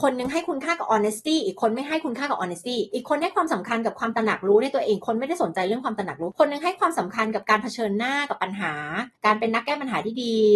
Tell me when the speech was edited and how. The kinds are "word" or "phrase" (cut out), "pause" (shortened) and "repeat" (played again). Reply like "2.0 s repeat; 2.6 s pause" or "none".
none